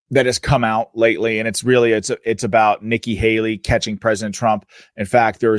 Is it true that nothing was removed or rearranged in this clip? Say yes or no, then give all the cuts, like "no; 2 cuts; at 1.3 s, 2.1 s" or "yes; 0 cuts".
yes; 0 cuts